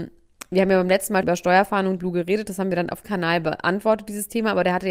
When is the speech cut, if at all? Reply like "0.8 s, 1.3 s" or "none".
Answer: 1.2 s, 2.0 s, 3.0 s